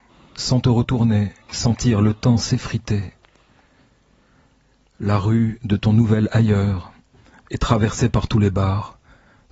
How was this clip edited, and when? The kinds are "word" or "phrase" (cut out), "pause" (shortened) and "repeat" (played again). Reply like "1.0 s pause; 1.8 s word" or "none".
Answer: 1.4 s pause